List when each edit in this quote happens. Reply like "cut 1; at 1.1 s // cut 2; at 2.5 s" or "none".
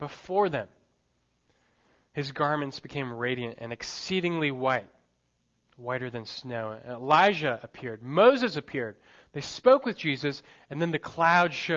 none